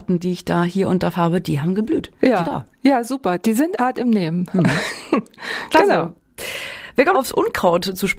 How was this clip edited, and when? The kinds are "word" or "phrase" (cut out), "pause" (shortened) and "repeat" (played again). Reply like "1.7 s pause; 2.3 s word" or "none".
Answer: 1.1 s word; 2.4 s word; 3.8 s word; 7.1 s word

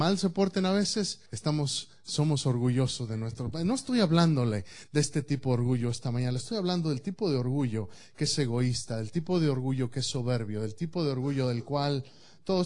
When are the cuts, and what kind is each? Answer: 1.3 s pause

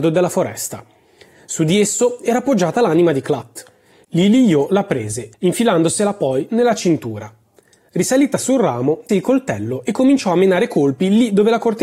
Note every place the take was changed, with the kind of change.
5.3 s pause; 9.1 s word

